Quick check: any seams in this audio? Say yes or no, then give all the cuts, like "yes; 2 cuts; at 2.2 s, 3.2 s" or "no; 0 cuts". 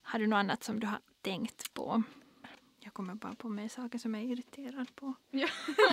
no; 0 cuts